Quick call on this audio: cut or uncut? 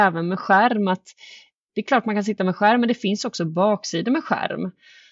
uncut